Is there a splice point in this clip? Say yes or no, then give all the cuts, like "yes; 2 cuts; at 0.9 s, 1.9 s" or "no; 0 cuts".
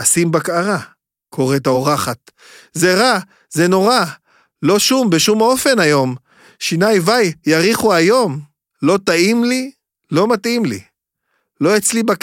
no; 0 cuts